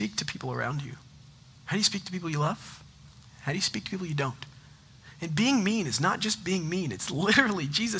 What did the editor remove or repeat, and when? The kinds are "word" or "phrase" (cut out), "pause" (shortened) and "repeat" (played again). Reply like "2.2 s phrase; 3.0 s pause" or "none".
none